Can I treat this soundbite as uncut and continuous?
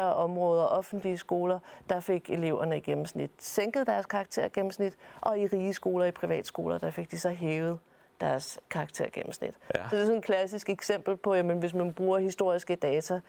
yes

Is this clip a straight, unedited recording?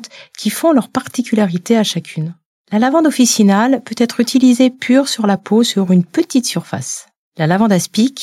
yes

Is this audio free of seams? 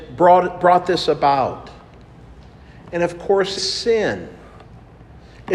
no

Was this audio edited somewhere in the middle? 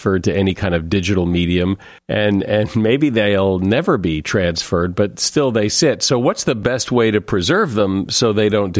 yes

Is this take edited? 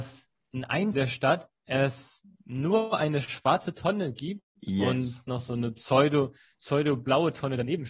yes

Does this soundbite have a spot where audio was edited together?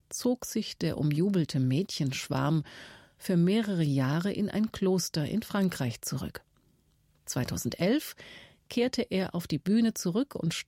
no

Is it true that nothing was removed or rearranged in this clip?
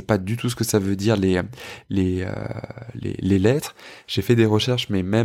yes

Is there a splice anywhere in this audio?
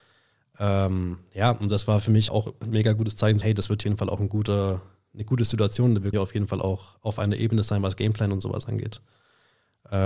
yes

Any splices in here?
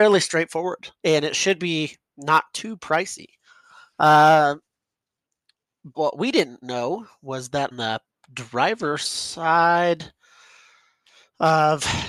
yes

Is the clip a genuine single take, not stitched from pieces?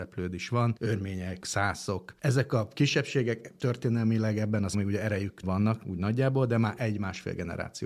no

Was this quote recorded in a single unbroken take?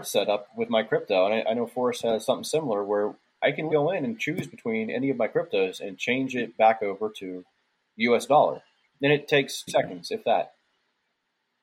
no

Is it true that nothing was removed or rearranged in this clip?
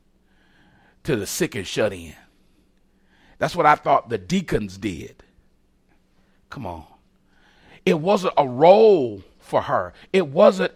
yes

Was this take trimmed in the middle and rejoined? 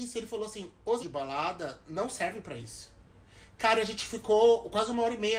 yes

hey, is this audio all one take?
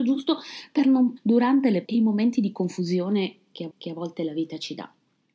no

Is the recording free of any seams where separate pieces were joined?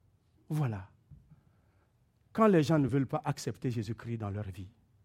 yes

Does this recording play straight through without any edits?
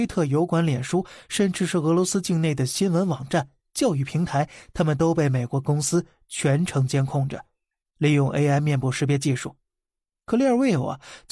yes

